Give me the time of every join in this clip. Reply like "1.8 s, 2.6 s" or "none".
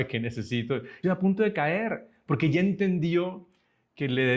1.0 s